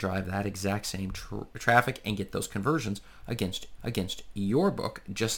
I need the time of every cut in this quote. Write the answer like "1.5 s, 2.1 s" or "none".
3.8 s